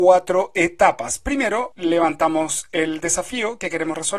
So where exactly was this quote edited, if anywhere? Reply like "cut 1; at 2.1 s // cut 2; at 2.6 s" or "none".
none